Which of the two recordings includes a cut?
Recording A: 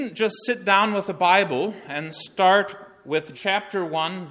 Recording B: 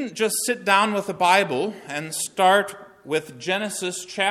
A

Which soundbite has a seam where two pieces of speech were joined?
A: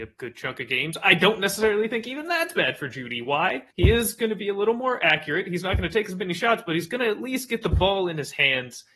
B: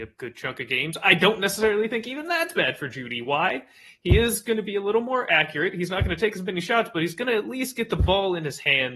A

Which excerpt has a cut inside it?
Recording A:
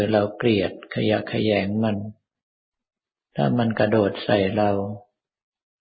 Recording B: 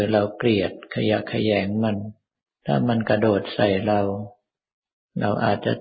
B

